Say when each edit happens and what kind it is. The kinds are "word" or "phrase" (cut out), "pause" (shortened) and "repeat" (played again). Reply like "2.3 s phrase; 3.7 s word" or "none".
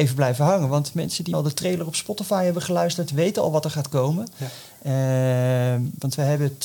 1.3 s word